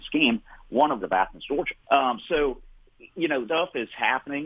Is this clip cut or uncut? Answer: cut